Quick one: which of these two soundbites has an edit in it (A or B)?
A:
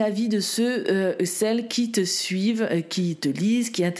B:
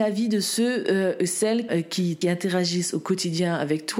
B